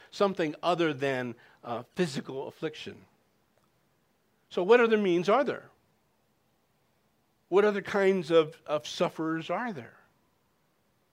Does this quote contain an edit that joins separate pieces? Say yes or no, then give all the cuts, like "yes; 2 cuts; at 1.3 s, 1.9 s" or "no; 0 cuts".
no; 0 cuts